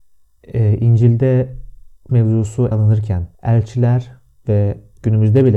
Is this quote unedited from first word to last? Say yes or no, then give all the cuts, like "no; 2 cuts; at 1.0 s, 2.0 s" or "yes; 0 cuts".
no; 3 cuts; at 2.1 s, 2.7 s, 3.3 s